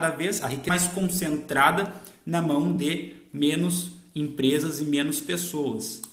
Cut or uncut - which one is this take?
uncut